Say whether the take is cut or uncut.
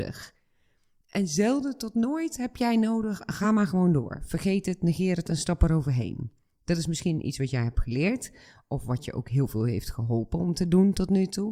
uncut